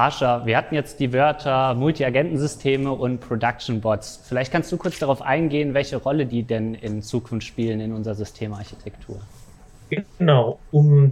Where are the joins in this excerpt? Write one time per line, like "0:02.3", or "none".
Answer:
none